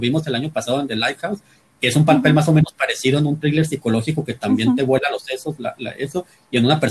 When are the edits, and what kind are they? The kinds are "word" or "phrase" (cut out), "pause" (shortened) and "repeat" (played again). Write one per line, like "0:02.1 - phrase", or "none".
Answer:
none